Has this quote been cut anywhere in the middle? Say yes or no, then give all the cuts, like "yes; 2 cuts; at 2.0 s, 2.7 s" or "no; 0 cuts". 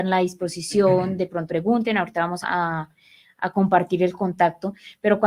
yes; 2 cuts; at 1.5 s, 2.4 s